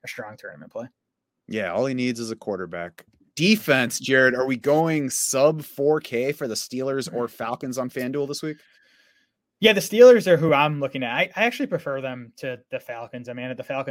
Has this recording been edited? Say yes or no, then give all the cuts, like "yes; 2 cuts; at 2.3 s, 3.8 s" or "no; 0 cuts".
no; 0 cuts